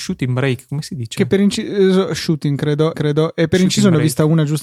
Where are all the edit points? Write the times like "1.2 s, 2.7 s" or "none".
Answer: 2.9 s